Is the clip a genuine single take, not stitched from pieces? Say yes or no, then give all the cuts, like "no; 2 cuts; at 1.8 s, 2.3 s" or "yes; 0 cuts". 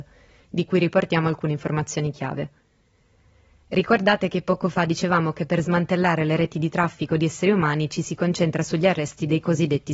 yes; 0 cuts